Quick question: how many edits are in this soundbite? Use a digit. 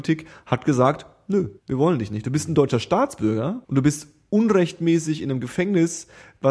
2